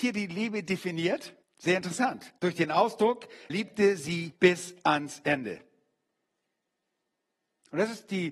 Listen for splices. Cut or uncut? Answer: cut